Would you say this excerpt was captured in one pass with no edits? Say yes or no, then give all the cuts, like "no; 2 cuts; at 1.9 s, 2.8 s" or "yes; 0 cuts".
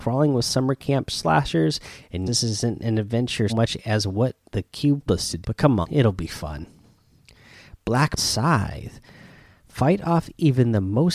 no; 6 cuts; at 2.3 s, 3.5 s, 5.1 s, 5.4 s, 5.8 s, 8.2 s